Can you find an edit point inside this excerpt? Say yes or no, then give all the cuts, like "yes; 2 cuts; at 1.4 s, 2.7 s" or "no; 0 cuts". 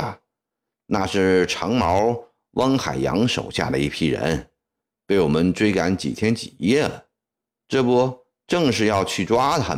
no; 0 cuts